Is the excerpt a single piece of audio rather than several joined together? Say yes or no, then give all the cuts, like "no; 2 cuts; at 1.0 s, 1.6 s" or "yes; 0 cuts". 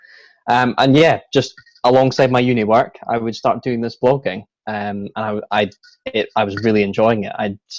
yes; 0 cuts